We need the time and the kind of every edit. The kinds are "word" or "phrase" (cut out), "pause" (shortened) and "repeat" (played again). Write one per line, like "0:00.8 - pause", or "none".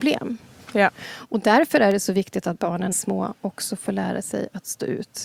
0:02.9 - phrase